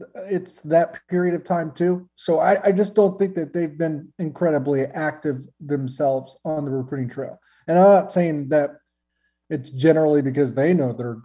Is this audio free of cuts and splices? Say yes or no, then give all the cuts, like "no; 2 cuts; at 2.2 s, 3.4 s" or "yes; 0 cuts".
yes; 0 cuts